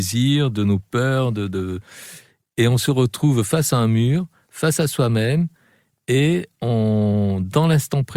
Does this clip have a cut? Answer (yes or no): no